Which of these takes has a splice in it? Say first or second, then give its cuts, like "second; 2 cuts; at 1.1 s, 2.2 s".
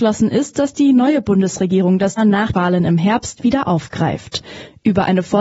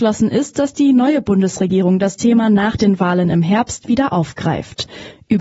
first; 2 cuts; at 2.2 s, 2.5 s